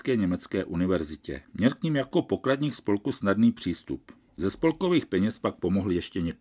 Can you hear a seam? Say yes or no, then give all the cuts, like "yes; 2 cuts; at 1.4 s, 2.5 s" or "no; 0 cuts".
yes; 1 cut; at 1.4 s